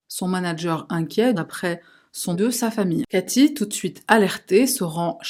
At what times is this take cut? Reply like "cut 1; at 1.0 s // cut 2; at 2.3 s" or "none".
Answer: cut 1; at 1.3 s // cut 2; at 2.3 s